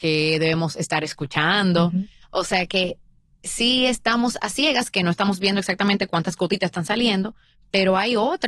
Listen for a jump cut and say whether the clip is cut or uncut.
uncut